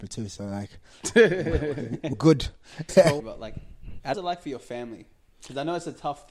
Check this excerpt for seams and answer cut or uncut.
cut